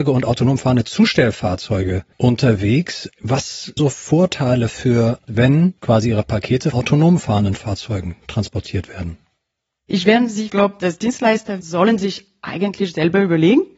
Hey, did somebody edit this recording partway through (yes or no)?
yes